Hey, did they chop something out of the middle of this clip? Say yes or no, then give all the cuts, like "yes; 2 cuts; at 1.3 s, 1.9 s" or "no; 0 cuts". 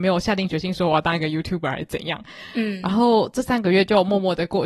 no; 0 cuts